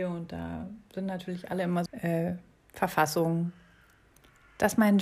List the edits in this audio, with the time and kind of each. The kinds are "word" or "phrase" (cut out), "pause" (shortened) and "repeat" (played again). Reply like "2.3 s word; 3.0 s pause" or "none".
1.9 s phrase; 2.6 s pause